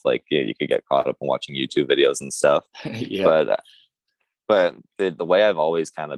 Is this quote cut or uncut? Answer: uncut